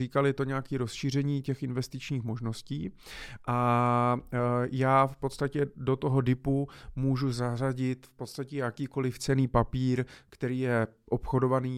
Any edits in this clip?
no; 0 cuts

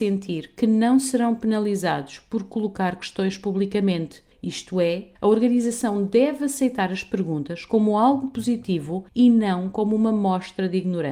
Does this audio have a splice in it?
yes; 3 cuts; at 4.3 s, 5.2 s, 9.1 s

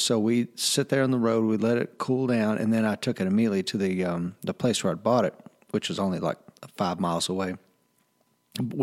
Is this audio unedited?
yes; 0 cuts

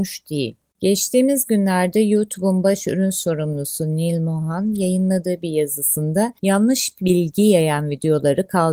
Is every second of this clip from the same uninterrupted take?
no; 1 cut; at 6.4 s

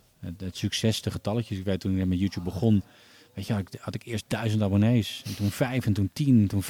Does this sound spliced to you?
no; 0 cuts

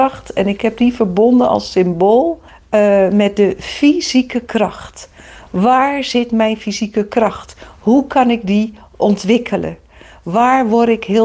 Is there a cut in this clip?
yes; 1 cut; at 2.5 s

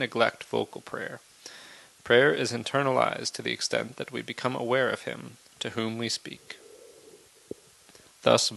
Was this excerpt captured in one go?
yes; 0 cuts

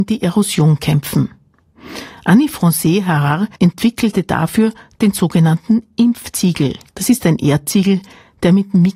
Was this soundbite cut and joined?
yes; 2 cuts; at 3.5 s, 6.9 s

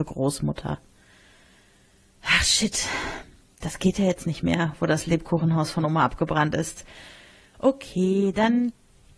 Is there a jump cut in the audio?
no; 0 cuts

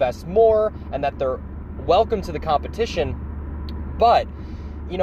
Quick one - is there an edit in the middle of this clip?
no; 0 cuts

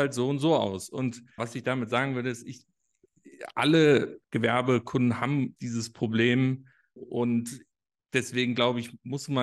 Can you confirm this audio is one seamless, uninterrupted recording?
no; 4 cuts; at 1.4 s, 4.2 s, 5.6 s, 7.0 s

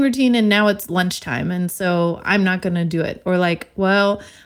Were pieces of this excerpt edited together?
no; 0 cuts

